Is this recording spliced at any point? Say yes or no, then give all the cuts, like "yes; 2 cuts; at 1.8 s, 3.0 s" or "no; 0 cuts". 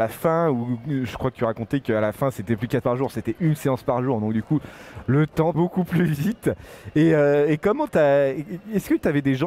yes; 2 cuts; at 2.8 s, 5.5 s